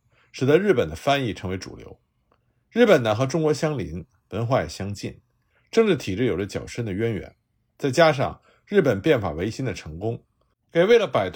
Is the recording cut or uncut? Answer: uncut